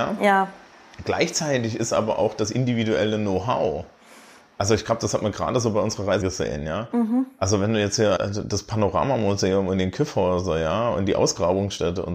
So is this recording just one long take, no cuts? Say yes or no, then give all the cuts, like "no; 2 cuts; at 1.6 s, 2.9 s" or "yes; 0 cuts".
no; 2 cuts; at 6.2 s, 8.2 s